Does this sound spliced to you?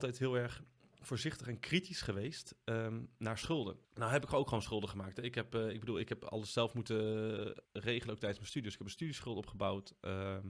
yes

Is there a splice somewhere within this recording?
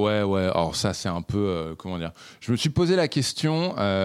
no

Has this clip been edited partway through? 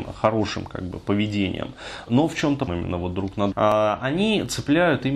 yes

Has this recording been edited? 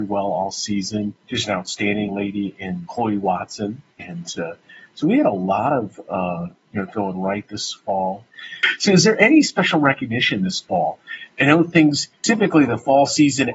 yes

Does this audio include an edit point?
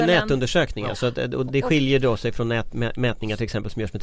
yes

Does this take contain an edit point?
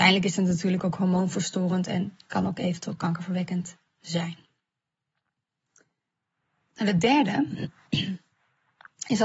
no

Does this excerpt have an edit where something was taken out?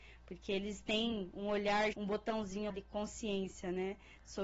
yes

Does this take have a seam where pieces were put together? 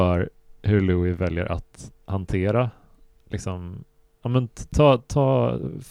no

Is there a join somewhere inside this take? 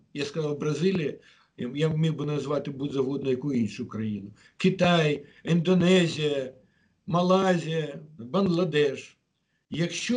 yes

